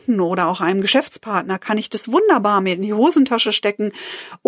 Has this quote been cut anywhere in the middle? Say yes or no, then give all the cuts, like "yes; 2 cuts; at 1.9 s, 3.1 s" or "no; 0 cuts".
no; 0 cuts